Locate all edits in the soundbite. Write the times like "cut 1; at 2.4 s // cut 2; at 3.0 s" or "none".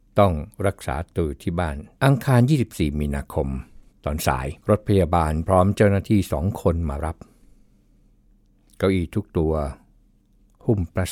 cut 1; at 1.9 s // cut 2; at 3.9 s // cut 3; at 4.6 s